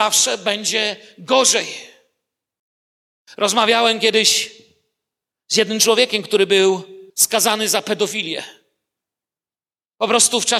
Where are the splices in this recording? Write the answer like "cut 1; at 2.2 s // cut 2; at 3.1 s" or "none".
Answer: cut 1; at 7.1 s